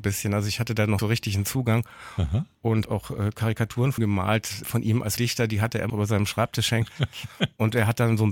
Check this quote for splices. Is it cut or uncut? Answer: cut